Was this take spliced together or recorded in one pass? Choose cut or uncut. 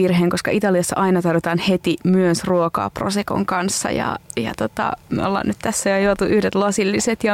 uncut